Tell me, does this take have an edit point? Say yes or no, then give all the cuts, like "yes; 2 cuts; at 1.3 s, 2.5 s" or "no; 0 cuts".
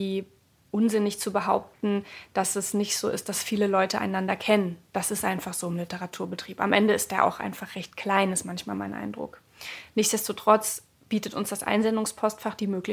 no; 0 cuts